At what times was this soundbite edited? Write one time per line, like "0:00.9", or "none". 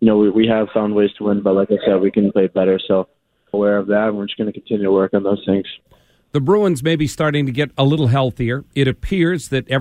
0:02.3
0:03.5